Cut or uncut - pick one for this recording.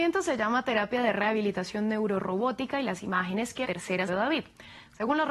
cut